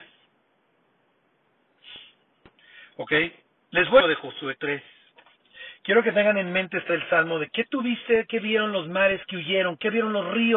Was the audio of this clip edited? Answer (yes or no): yes